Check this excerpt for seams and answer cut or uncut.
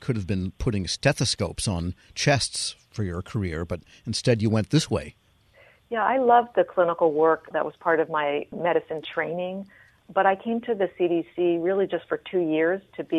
uncut